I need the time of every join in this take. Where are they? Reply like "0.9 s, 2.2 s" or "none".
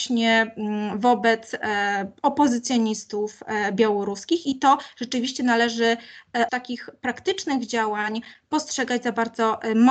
6.5 s